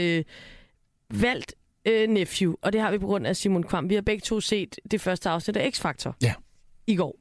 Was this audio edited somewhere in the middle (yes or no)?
no